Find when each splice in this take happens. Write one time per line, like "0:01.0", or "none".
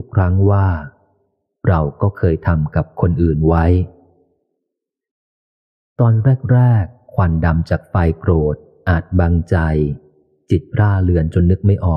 none